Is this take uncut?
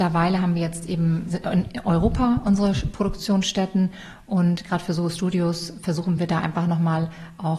yes; 0 cuts

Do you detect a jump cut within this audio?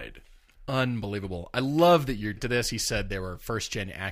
yes; 1 cut; at 2.4 s

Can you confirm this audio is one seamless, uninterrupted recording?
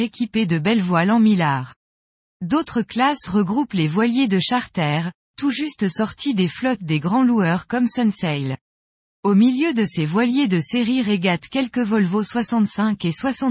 yes; 0 cuts

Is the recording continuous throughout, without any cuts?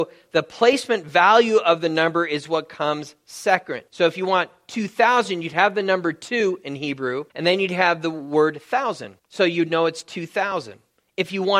no; 3 cuts; at 3.9 s, 7.3 s, 9.2 s

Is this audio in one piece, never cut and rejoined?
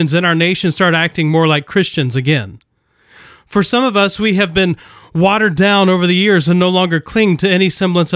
yes; 0 cuts

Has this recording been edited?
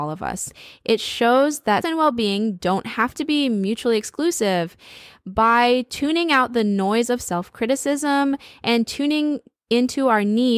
yes; 1 cut; at 1.8 s

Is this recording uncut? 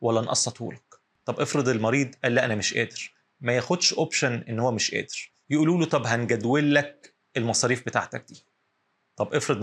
yes; 0 cuts

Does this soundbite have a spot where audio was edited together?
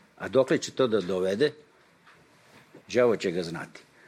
yes; 1 cut; at 2.8 s

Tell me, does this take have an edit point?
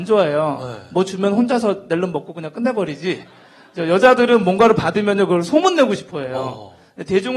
no; 0 cuts

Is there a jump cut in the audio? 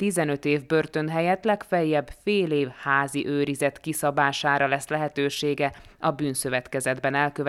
no; 0 cuts

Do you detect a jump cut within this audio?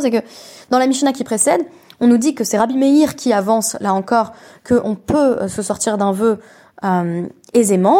no; 0 cuts

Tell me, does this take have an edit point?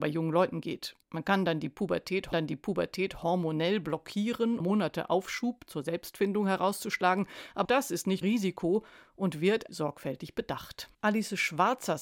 yes; 6 cuts; at 1.0 s, 2.3 s, 4.6 s, 7.6 s, 8.2 s, 10.9 s

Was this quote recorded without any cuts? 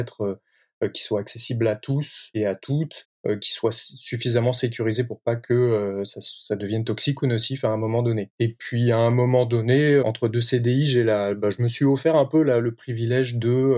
no; 2 cuts; at 3.1 s, 10.0 s

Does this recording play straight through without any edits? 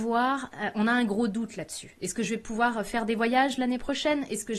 yes; 0 cuts

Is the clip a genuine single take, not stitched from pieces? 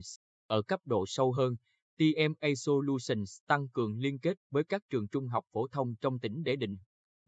yes; 0 cuts

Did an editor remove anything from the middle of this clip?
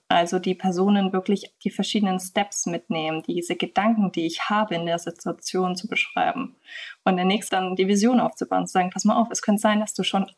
yes; 1 cut; at 7.5 s

